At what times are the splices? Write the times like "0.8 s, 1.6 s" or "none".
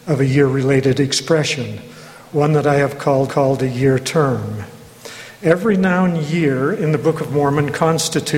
3.3 s